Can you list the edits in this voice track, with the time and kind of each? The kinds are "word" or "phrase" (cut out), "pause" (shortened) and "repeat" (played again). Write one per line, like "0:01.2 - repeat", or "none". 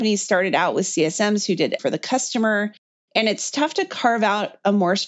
0:01.8 - word